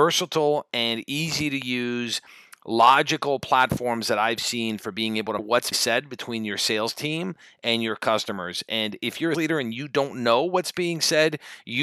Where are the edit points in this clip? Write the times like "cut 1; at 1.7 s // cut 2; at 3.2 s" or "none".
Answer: cut 1; at 5.4 s // cut 2; at 5.7 s // cut 3; at 9.3 s